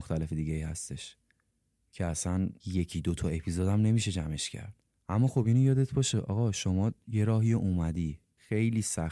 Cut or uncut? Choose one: uncut